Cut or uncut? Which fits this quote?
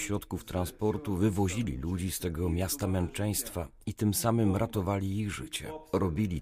uncut